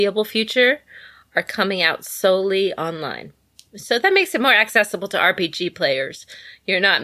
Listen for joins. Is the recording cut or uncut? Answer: uncut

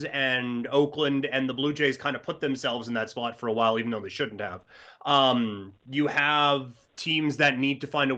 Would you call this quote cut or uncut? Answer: uncut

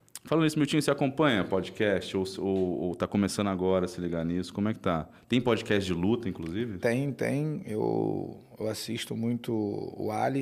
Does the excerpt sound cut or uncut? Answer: uncut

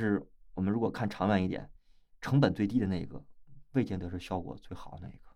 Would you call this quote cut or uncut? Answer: uncut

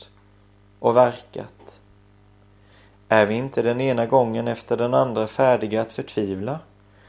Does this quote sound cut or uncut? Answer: uncut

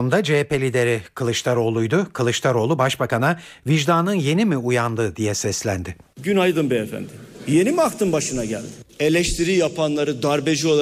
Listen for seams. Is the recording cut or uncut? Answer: cut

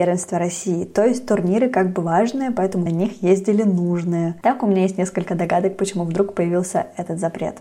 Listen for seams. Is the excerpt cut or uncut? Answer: cut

